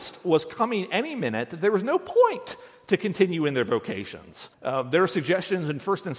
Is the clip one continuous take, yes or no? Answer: no